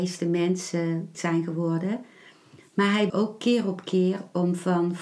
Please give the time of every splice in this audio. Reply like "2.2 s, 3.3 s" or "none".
1.1 s, 3.1 s